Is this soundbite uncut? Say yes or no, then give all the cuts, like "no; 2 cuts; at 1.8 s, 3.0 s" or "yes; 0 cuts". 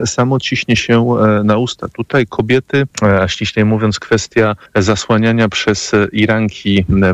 no; 2 cuts; at 2.9 s, 4.7 s